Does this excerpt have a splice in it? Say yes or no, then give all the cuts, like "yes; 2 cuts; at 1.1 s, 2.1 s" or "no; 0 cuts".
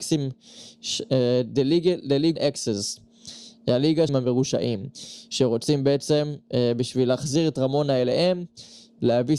yes; 2 cuts; at 2.4 s, 4.1 s